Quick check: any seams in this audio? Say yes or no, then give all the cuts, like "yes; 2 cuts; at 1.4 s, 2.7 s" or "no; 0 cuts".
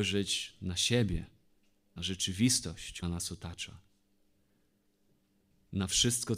yes; 2 cuts; at 2.0 s, 3.0 s